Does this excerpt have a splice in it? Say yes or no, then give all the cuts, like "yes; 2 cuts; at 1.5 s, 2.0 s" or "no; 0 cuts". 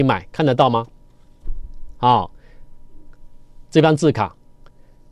no; 0 cuts